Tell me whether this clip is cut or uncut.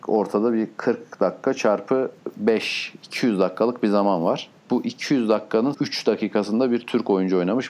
cut